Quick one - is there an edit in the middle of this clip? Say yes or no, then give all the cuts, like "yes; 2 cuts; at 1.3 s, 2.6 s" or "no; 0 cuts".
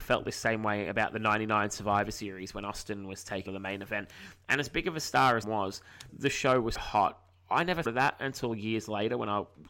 yes; 5 cuts; at 3.5 s, 5.4 s, 6.1 s, 6.8 s, 7.9 s